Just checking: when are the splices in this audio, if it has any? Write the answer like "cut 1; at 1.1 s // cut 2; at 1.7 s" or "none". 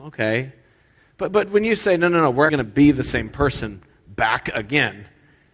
cut 1; at 2.5 s